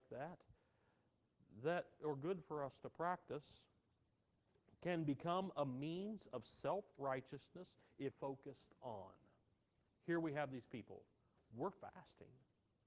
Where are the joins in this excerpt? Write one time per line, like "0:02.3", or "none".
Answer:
0:08.1

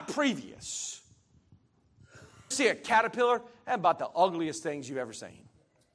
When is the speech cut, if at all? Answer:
0:02.5

